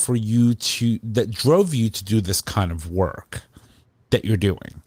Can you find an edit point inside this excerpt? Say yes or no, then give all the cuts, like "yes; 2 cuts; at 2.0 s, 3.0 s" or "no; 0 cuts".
no; 0 cuts